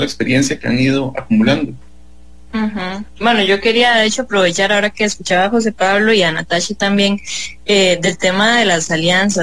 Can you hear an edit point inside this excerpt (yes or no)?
no